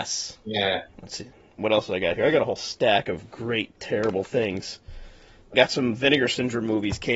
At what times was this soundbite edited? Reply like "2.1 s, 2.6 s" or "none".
5.5 s